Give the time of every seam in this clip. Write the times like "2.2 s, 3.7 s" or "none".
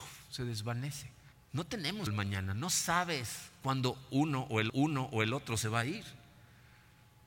1.3 s, 2.1 s, 4.7 s